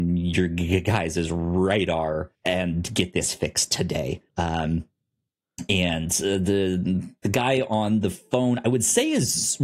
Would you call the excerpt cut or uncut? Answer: cut